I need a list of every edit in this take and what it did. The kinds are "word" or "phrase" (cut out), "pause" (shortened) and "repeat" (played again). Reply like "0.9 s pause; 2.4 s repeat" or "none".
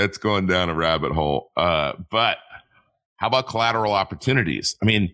none